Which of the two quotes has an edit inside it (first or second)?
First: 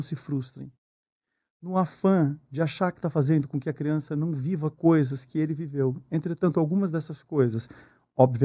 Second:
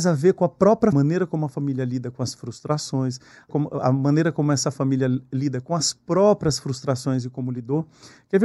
second